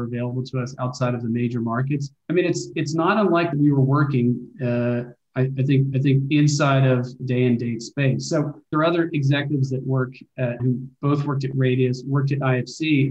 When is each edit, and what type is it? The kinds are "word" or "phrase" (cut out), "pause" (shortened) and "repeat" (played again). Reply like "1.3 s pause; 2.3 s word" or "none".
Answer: 2.2 s pause; 2.7 s word; 3.5 s phrase; 5.9 s repeat; 7.2 s phrase; 8.7 s phrase; 10.6 s word